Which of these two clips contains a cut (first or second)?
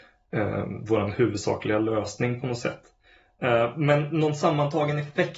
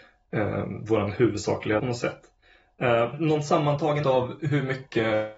second